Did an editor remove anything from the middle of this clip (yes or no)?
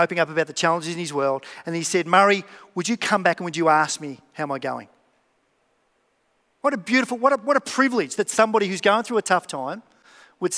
no